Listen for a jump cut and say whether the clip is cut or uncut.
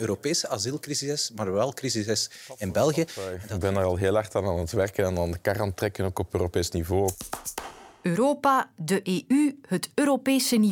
uncut